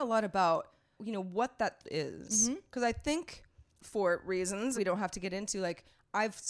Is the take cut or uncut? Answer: cut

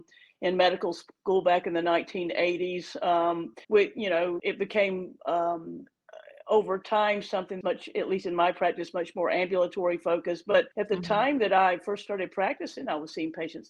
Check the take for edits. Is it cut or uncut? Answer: cut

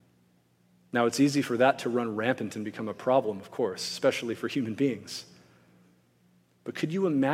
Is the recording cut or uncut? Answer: uncut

